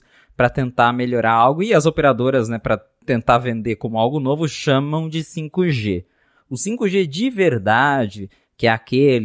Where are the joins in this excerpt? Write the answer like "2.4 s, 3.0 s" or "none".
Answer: none